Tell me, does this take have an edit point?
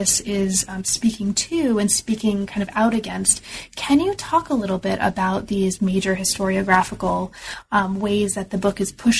no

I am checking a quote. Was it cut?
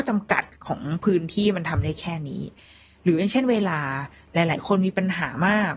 no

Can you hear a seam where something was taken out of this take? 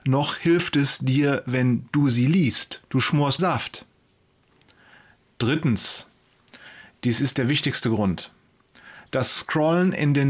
yes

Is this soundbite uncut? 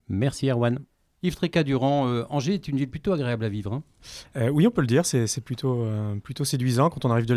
yes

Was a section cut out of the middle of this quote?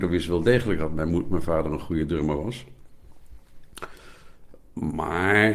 no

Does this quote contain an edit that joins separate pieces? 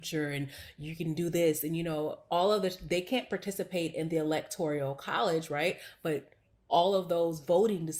no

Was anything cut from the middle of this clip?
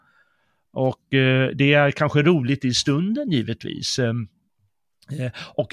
no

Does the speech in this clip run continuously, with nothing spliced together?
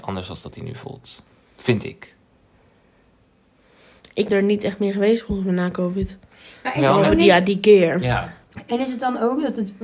no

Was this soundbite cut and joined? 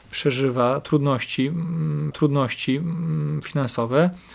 yes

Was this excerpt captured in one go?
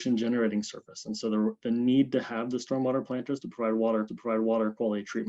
no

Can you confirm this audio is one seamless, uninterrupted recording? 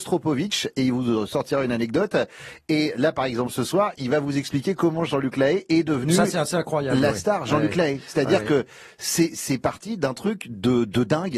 yes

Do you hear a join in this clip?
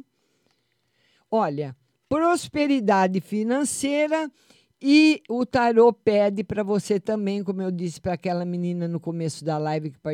no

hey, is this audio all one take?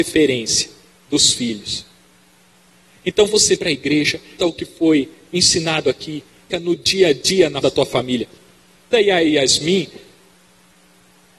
no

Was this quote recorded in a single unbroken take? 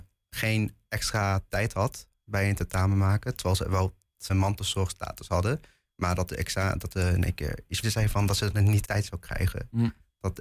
no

